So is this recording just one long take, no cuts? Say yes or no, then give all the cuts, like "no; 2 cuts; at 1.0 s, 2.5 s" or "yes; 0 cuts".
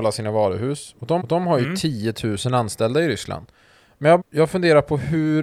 no; 2 cuts; at 1.2 s, 4.2 s